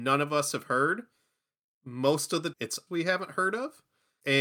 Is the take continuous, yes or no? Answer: no